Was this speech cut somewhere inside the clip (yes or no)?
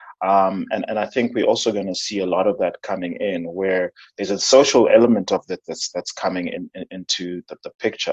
no